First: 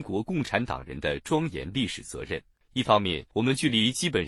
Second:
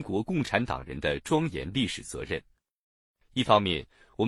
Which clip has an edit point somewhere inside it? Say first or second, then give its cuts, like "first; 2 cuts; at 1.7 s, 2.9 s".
first; 2 cuts; at 2.6 s, 3.3 s